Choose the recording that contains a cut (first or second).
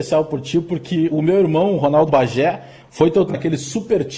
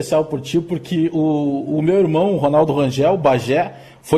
first